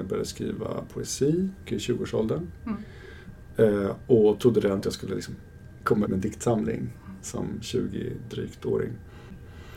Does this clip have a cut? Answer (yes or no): yes